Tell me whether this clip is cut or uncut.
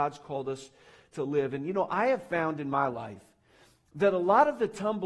uncut